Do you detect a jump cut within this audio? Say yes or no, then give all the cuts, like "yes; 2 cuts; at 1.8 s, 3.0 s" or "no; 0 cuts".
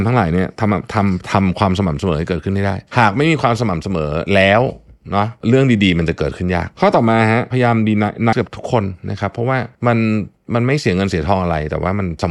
yes; 2 cuts; at 8.3 s, 9.7 s